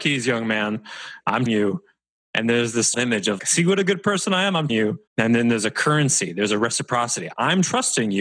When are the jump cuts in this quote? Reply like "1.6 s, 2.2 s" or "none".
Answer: 1.5 s, 2.9 s, 3.4 s, 4.7 s, 5.1 s